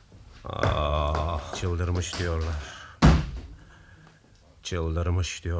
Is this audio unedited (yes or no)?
no